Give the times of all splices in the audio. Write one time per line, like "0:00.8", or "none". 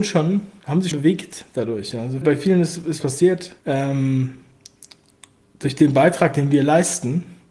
0:00.9
0:02.2
0:03.0
0:03.6